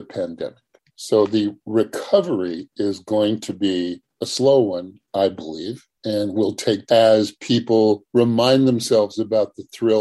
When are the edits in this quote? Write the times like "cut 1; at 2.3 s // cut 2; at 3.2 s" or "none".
cut 1; at 5.9 s // cut 2; at 6.9 s